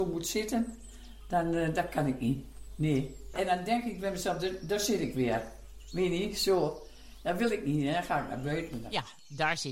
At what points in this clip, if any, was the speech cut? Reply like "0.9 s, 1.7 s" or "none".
none